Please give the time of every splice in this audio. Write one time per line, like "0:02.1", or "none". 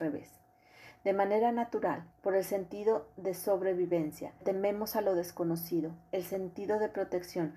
0:02.1
0:04.4